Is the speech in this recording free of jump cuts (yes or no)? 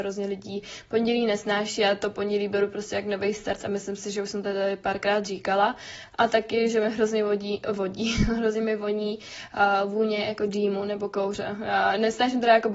yes